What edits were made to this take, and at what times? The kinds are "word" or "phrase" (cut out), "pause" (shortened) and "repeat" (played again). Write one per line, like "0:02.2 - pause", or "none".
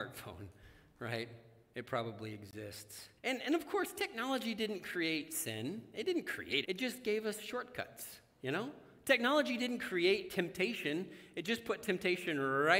0:03.2 - pause
0:06.6 - word